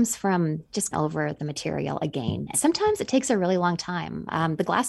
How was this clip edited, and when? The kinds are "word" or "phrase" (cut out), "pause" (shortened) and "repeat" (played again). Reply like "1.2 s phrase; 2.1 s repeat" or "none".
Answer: 0.9 s word; 2.5 s phrase